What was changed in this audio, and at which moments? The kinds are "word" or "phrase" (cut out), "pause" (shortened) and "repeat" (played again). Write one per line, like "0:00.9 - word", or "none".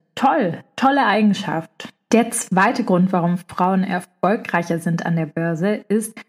none

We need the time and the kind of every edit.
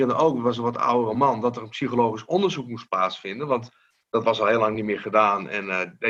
none

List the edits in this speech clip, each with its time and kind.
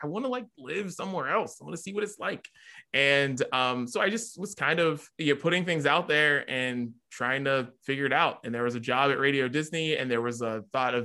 0:05.1 - pause

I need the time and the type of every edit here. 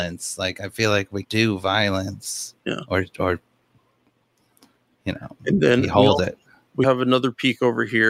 0:01.2 - word
0:02.6 - pause
0:06.8 - word

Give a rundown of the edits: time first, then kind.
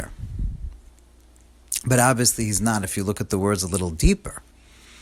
none

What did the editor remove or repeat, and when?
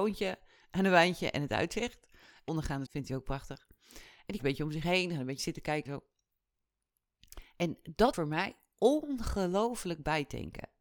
0:02.5 - word
0:02.9 - word
0:04.4 - word
0:05.4 - word
0:05.9 - word
0:08.1 - word

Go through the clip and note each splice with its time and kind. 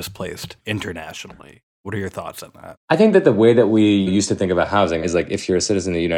0:02.8 - pause

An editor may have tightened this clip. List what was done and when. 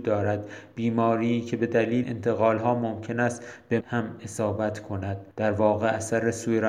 0:02.0 - word
0:03.8 - word
0:05.3 - pause

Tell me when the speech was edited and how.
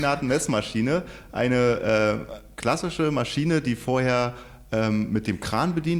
none

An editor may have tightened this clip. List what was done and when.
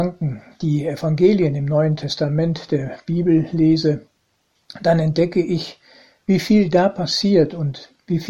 none

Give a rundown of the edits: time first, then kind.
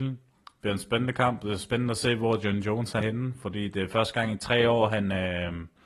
0:03.0 - word

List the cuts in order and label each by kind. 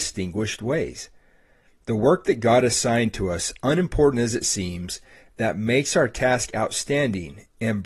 none

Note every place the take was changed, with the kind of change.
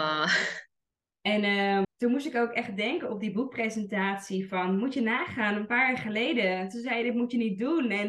0:01.8 - word

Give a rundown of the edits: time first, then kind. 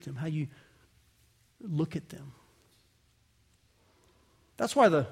none

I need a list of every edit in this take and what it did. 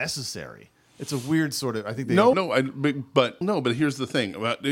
0:02.3 - word
0:03.4 - word

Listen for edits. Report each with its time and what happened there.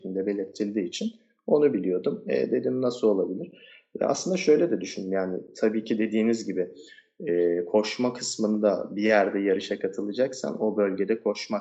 none

